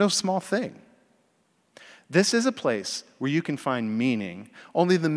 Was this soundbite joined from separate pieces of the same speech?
no; 0 cuts

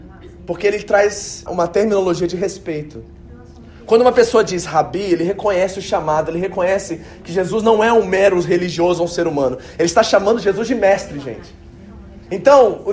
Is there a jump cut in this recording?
yes; 1 cut; at 1.5 s

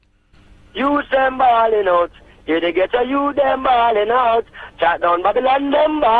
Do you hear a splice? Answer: no; 0 cuts

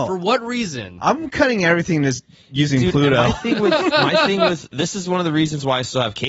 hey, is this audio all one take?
yes; 0 cuts

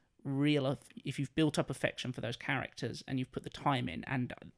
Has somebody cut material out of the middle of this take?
no; 0 cuts

